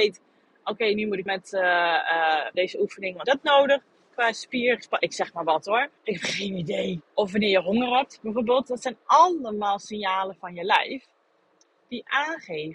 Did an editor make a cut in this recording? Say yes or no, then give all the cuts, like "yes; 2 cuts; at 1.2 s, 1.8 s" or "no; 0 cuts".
yes; 6 cuts; at 1.3 s, 2.5 s, 3.2 s, 4.0 s, 6.0 s, 7.1 s